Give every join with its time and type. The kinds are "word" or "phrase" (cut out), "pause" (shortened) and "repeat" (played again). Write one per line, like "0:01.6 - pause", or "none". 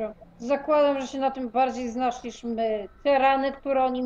0:02.9 - pause

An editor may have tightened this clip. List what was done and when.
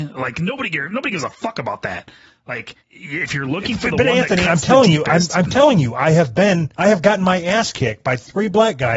0:02.8 - pause
0:06.7 - pause

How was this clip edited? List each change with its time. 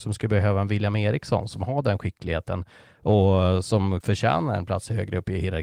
0:04.0 - word

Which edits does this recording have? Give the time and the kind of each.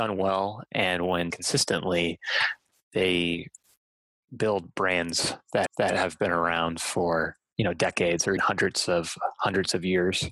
0:01.3 - word
0:05.7 - repeat
0:08.4 - word

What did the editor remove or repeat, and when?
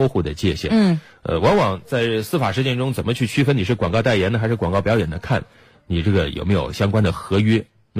none

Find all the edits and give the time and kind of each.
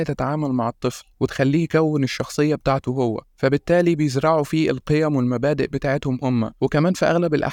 0:01.1 - pause
0:03.3 - pause

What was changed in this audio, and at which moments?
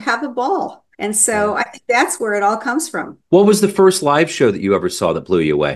0:00.9 - pause
0:03.2 - pause

